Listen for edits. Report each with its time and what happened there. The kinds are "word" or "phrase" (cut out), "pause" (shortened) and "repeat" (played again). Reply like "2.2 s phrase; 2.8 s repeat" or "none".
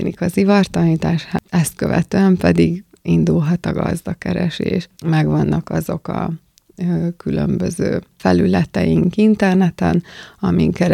none

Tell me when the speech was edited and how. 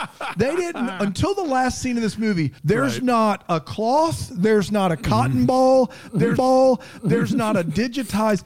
2.6 s pause; 6.4 s repeat

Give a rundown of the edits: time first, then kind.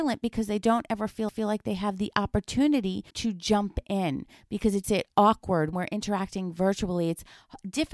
1.3 s repeat; 3.1 s pause; 4.8 s phrase; 5.7 s word

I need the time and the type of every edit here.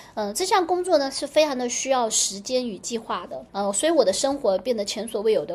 3.5 s pause

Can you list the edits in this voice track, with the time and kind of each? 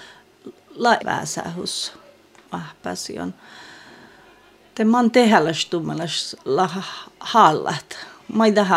1.0 s word; 2.5 s phrase; 6.4 s pause

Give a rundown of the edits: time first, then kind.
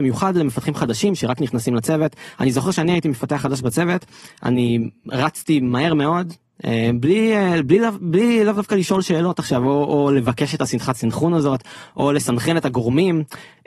none

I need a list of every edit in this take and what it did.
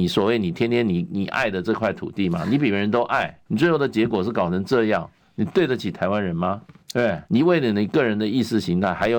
3.5 s pause; 6.8 s pause; 7.3 s pause

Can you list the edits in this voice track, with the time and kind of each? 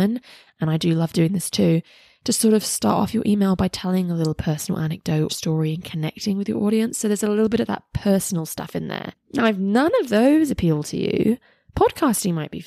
5.3 s word

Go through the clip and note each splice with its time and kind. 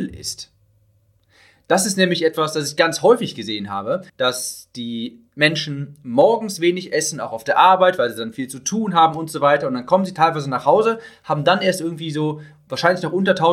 4.1 s pause

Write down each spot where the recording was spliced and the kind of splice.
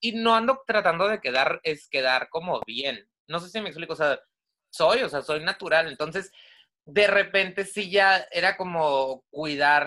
none

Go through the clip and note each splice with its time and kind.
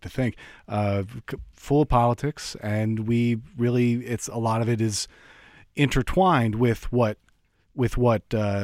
none

